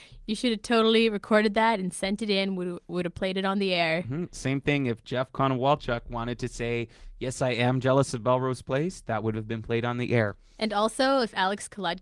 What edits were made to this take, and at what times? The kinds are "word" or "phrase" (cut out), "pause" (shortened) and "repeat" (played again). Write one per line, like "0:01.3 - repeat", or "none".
none